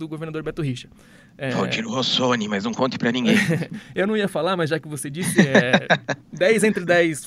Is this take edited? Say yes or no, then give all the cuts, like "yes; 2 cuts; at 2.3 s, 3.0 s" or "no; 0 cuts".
no; 0 cuts